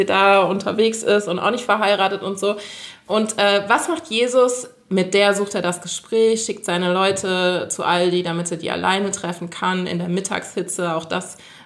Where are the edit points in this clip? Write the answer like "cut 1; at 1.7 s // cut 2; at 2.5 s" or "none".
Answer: none